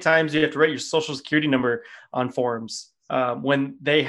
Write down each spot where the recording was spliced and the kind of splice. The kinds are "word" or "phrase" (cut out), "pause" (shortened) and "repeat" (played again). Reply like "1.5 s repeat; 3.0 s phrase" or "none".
none